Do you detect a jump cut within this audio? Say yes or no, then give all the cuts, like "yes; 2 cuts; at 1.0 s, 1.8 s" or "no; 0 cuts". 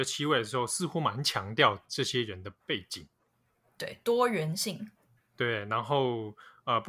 no; 0 cuts